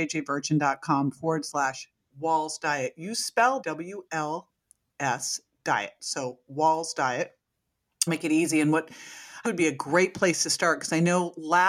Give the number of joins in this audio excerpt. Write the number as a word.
four